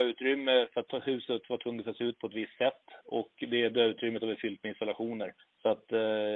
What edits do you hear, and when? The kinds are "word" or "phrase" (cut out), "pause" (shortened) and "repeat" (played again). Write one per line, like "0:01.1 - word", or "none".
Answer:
0:05.4 - pause

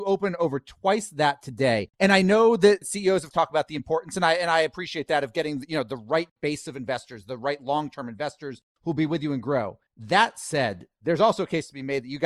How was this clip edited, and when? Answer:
0:01.9 - pause
0:03.3 - phrase
0:09.9 - pause

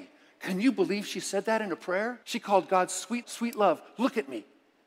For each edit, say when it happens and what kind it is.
0:02.2 - pause
0:03.2 - word

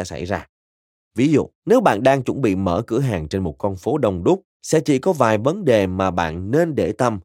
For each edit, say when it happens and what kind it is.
0:01.6 - pause
0:04.5 - pause

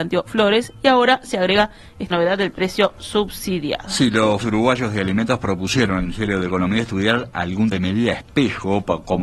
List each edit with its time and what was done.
0:02.1 - word
0:04.4 - word
0:06.0 - word
0:07.7 - word

